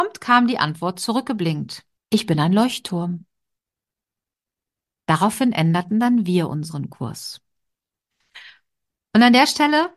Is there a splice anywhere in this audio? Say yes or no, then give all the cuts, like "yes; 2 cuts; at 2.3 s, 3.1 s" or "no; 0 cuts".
yes; 1 cut; at 2.0 s